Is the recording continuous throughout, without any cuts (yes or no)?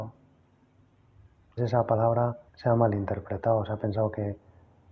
no